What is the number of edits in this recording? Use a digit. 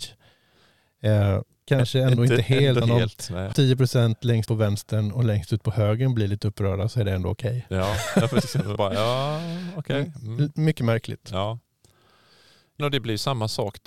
6